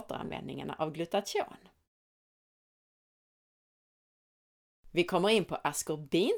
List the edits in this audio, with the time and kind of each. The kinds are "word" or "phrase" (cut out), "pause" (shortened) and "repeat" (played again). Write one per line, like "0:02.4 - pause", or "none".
none